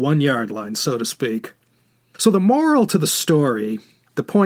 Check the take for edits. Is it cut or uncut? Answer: uncut